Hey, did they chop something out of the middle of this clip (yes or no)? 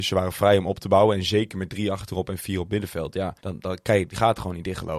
yes